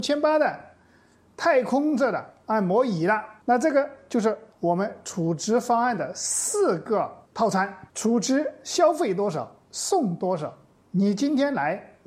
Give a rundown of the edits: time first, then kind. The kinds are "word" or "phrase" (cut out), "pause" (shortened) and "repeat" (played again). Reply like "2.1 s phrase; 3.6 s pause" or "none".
3.4 s pause; 7.3 s pause; 7.9 s pause